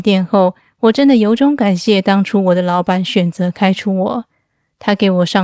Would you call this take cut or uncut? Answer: uncut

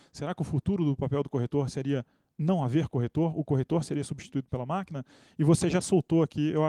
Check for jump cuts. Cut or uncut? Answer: uncut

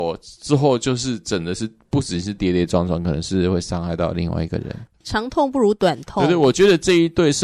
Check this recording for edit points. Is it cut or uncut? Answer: uncut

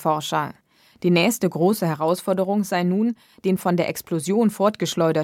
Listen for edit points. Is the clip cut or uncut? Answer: uncut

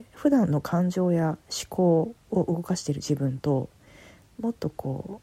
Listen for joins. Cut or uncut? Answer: uncut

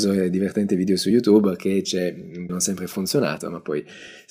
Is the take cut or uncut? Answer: cut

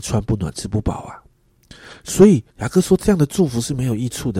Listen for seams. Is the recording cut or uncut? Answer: cut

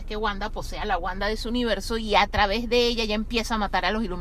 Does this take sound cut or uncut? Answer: uncut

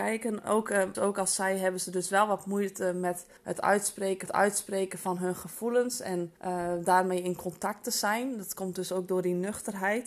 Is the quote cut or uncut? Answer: cut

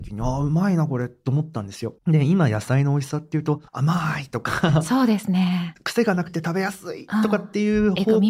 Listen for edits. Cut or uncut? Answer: cut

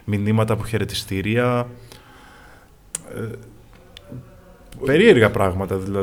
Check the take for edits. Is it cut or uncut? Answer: cut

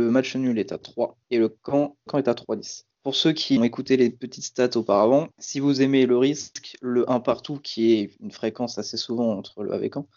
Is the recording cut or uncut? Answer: cut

